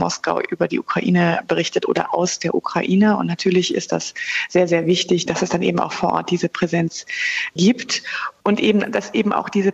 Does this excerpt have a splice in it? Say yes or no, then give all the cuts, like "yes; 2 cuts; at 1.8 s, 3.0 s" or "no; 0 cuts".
no; 0 cuts